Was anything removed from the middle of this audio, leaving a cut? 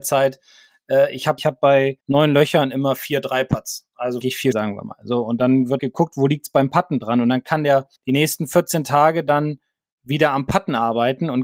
yes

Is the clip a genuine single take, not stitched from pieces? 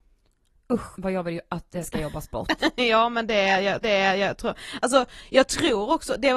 no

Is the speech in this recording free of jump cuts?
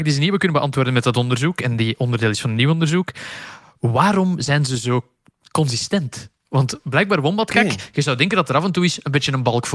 yes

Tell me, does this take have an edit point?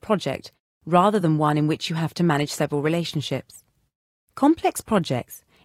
no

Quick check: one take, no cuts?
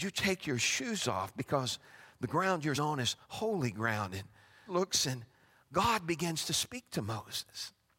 no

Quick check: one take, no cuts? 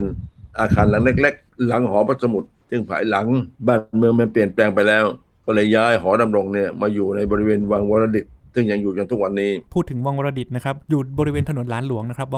no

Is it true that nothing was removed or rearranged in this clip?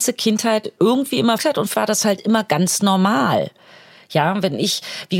no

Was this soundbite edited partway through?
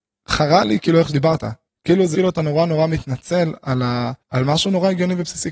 yes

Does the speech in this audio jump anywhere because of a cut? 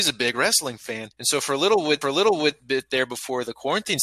yes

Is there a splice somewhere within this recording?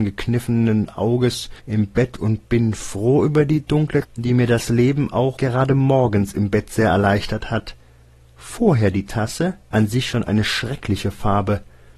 yes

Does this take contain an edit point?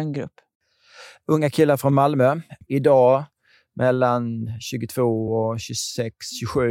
no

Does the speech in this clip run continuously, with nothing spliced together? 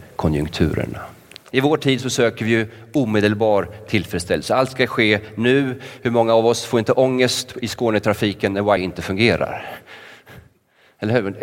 no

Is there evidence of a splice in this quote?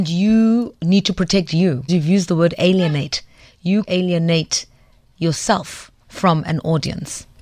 yes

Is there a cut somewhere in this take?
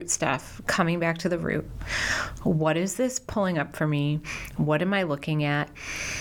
no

